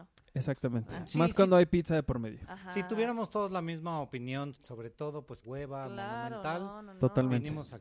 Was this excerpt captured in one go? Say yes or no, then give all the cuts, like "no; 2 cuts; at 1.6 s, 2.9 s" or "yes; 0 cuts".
no; 2 cuts; at 4.5 s, 5.4 s